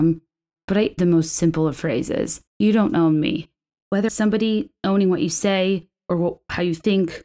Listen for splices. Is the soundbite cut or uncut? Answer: cut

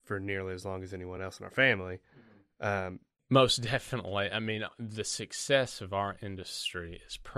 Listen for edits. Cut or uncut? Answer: uncut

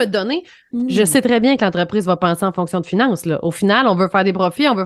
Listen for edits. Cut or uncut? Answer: uncut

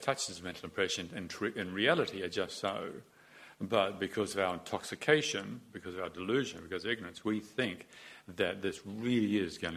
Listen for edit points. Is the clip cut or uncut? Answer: uncut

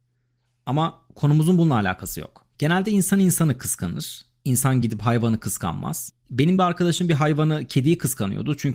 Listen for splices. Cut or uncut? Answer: uncut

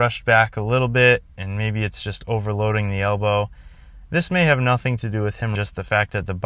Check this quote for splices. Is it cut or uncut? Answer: cut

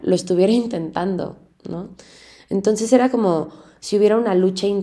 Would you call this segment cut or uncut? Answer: uncut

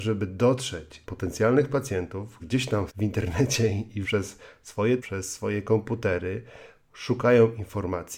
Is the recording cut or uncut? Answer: cut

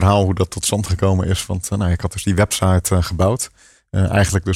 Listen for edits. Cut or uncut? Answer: uncut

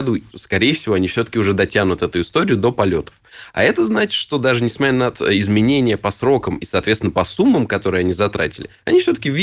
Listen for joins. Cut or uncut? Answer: cut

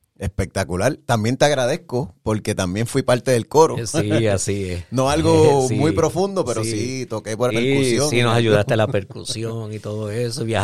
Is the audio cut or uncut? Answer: cut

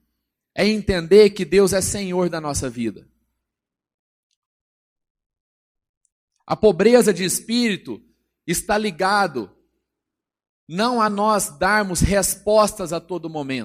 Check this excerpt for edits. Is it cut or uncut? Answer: uncut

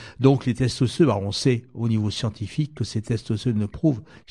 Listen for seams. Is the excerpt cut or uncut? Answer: uncut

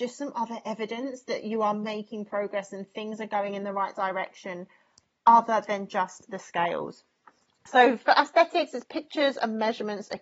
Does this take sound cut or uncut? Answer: uncut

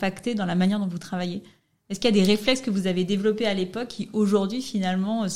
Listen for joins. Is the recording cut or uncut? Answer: uncut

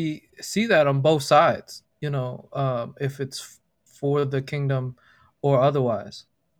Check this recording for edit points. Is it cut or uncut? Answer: cut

